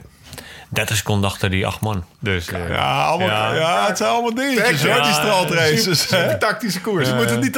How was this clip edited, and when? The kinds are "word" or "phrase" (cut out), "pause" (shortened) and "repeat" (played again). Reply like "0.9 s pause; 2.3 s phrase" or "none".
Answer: 2.1 s pause